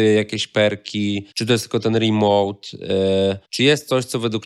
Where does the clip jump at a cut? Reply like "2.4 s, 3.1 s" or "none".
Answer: 1.3 s, 3.4 s